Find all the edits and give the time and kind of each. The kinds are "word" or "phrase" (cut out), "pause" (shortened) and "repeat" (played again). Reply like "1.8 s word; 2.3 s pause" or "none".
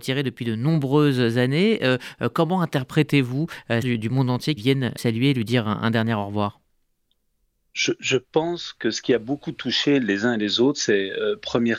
3.8 s phrase; 4.6 s word; 5.0 s word; 7.4 s pause